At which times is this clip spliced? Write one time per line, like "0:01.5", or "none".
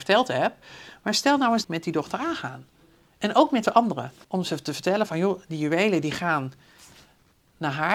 0:01.6
0:04.2